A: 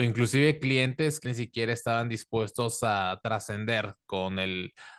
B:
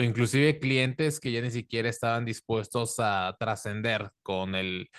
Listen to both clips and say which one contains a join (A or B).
A